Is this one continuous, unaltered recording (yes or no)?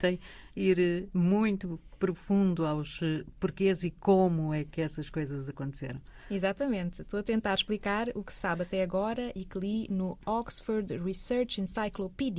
yes